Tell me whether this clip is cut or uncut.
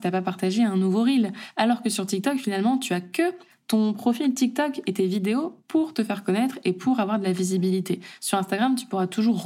uncut